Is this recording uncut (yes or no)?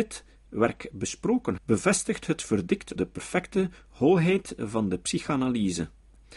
no